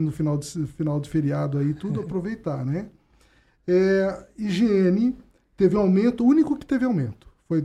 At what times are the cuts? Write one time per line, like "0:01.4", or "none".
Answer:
none